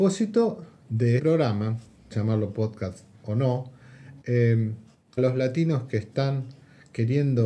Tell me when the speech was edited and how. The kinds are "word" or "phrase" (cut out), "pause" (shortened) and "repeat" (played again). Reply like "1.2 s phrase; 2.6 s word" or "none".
1.2 s word; 2.1 s word; 4.2 s word; 5.2 s phrase

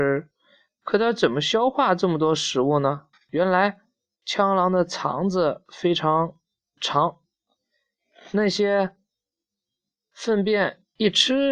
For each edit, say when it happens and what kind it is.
3.1 s pause

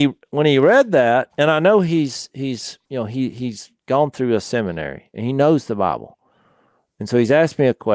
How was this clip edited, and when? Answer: 2.8 s pause

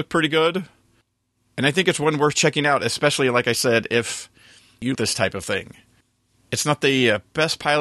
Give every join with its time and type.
4.9 s word

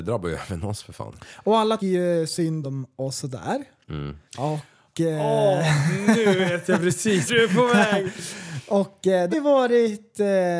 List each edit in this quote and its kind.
1.8 s word; 2.6 s word; 4.3 s pause; 7.3 s word; 9.3 s word

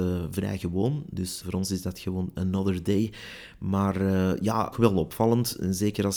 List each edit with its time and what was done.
1.4 s word; 4.7 s phrase

